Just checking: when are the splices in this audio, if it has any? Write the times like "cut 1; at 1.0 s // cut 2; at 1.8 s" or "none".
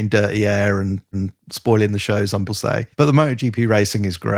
cut 1; at 1.1 s // cut 2; at 2.5 s // cut 3; at 2.9 s